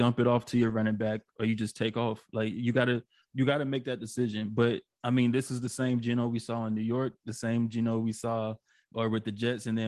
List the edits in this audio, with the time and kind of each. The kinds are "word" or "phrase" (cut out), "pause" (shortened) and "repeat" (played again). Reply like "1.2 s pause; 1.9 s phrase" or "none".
4.9 s pause